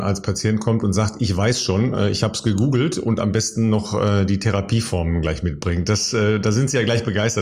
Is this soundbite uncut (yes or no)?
yes